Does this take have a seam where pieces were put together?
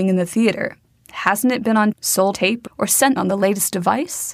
yes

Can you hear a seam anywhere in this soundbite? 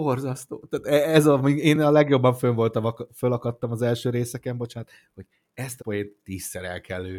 yes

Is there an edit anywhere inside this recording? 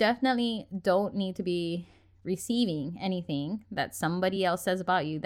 no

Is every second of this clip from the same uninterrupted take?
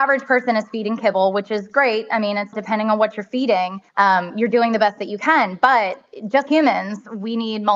no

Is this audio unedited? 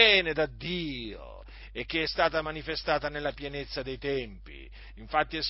yes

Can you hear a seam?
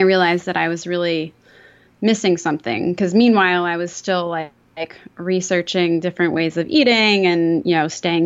no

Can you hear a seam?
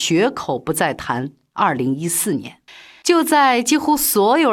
yes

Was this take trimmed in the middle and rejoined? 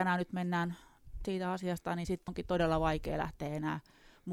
yes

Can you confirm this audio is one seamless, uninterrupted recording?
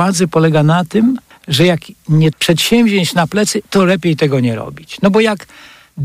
no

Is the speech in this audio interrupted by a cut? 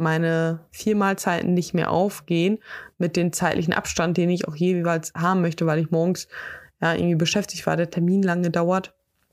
no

